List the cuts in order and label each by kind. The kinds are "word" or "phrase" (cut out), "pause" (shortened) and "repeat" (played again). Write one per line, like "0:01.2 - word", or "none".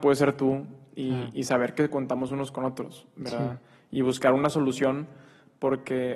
none